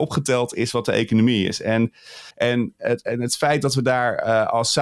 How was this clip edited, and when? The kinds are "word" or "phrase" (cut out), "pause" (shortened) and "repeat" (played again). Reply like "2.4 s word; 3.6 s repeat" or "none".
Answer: 2.3 s pause

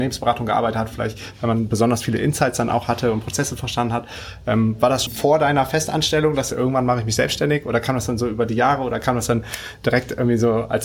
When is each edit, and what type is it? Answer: 5.1 s word; 6.5 s phrase

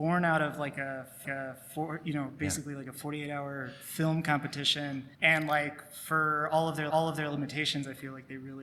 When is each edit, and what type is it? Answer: 1.2 s repeat; 5.1 s pause; 6.9 s repeat

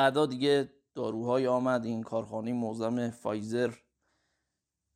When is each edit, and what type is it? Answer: none

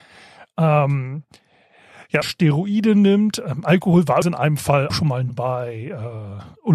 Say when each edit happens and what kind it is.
2.2 s word; 4.2 s word; 4.9 s word; 5.3 s word

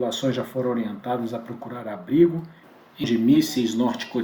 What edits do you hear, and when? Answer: 3.0 s word

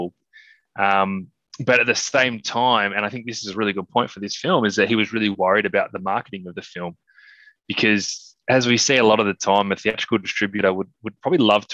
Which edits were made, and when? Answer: none

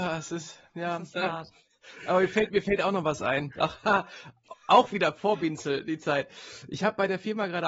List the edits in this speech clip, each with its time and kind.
none

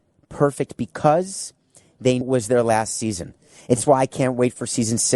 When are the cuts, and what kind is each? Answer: 2.2 s word

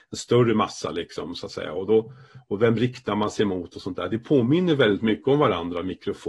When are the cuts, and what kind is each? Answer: none

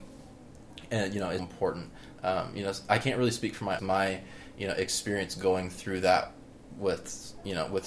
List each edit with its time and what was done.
1.4 s word; 3.8 s phrase

